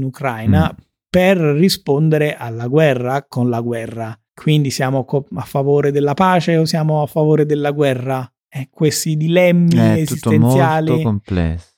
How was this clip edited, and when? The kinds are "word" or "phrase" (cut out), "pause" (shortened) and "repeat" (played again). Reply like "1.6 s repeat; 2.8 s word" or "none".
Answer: 4.3 s pause; 8.4 s pause